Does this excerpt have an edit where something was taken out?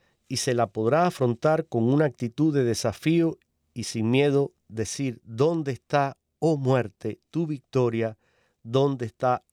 yes; 2 cuts; at 3.5 s, 4.6 s

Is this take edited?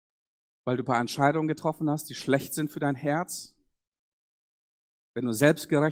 no; 0 cuts

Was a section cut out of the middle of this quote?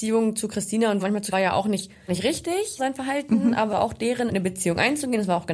yes; 6 cuts; at 1.0 s, 1.3 s, 2.1 s, 2.8 s, 3.7 s, 4.3 s

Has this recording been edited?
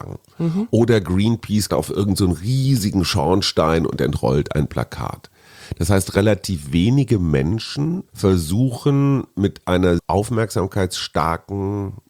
yes; 3 cuts; at 1.7 s, 8.1 s, 10.0 s

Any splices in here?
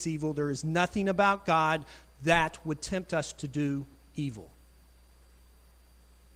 no; 0 cuts

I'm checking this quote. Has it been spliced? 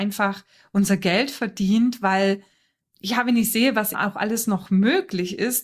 yes; 1 cut; at 3.9 s

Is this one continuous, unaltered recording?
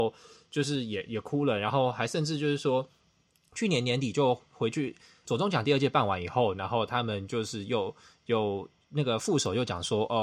no; 1 cut; at 5.2 s

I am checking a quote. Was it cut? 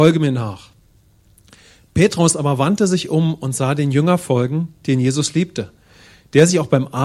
no; 0 cuts

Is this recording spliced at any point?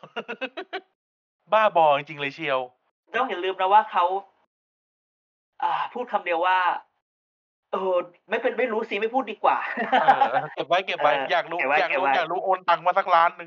yes; 1 cut; at 3.1 s

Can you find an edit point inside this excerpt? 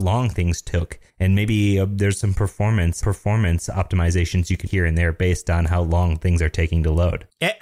yes; 3 cuts; at 1.1 s, 3.0 s, 4.7 s

